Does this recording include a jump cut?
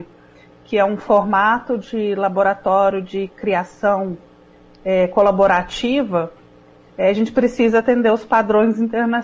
no; 0 cuts

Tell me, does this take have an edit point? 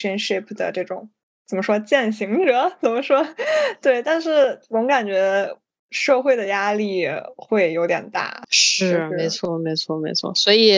no; 0 cuts

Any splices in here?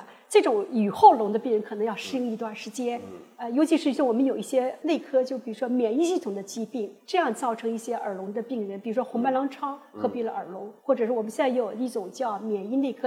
yes; 2 cuts; at 7.0 s, 10.8 s

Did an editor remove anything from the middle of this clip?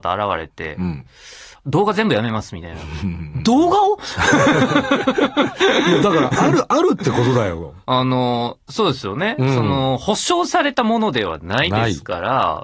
yes; 1 cut; at 7.8 s

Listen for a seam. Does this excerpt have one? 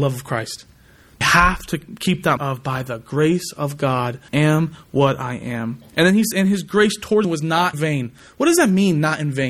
yes; 6 cuts; at 1.2 s, 2.4 s, 4.3 s, 6.3 s, 7.2 s, 7.7 s

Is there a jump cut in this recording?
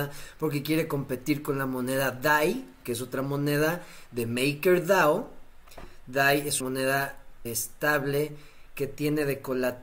yes; 2 cuts; at 6.6 s, 7.4 s

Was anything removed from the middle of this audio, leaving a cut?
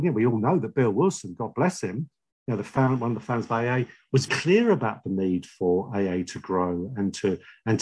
yes; 1 cut; at 4.3 s

